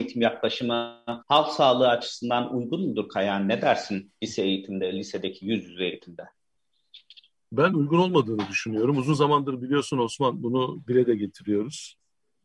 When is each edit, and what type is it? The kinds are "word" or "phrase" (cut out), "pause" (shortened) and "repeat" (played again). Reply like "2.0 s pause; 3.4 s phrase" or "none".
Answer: 1.2 s pause